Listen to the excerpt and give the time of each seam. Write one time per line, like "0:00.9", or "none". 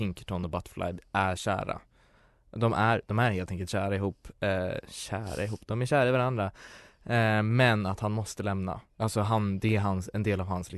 0:08.9